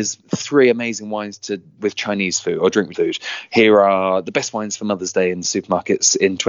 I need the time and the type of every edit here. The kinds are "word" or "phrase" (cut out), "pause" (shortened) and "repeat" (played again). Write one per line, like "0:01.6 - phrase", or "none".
0:01.8 - word
0:02.9 - word